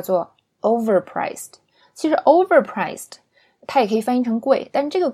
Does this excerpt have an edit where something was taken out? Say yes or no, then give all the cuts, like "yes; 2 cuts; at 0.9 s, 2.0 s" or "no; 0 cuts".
no; 0 cuts